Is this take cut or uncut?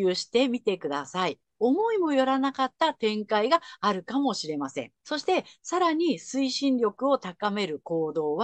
cut